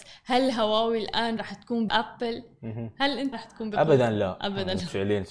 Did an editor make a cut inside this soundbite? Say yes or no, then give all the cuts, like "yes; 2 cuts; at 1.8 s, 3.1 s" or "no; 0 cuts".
yes; 3 cuts; at 1.4 s, 1.9 s, 3.3 s